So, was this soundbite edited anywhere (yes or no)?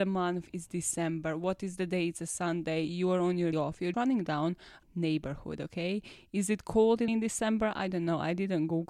yes